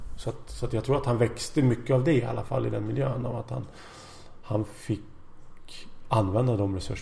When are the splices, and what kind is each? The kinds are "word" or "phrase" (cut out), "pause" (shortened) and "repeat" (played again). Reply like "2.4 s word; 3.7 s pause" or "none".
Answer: none